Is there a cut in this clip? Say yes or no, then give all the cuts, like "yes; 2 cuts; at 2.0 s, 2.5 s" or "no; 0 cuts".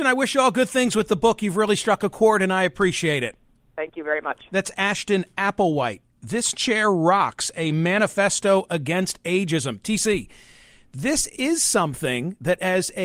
no; 0 cuts